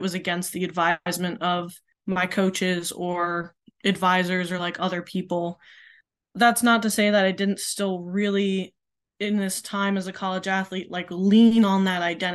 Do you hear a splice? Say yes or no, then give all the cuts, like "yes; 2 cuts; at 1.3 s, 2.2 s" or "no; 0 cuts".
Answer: no; 0 cuts